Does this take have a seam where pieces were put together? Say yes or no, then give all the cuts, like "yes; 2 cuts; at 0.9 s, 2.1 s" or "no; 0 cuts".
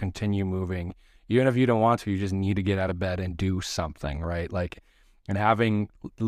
no; 0 cuts